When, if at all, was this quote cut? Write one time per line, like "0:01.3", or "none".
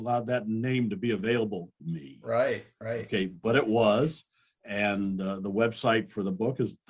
0:01.8